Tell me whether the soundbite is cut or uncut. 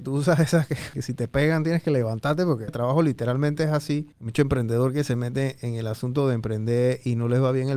cut